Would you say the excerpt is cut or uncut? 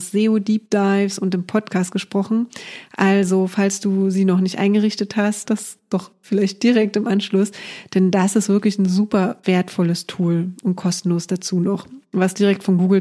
cut